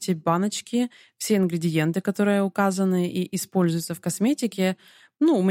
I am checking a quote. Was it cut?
no; 0 cuts

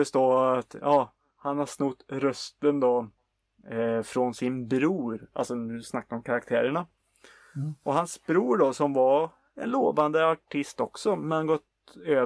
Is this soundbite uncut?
yes; 0 cuts

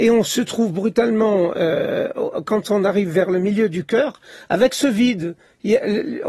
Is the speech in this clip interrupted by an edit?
no; 0 cuts

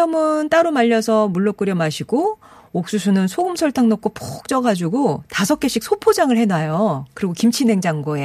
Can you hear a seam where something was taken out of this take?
no; 0 cuts

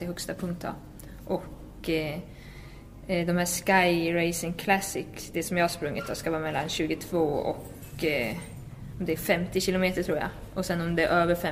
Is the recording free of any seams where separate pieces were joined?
yes; 0 cuts

